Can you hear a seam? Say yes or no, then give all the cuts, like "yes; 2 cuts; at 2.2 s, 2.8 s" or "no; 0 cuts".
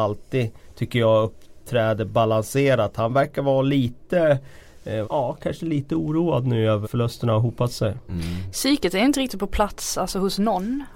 yes; 2 cuts; at 5.0 s, 6.8 s